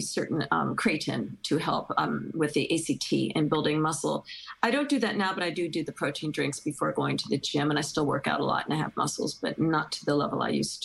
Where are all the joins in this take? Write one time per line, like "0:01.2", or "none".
none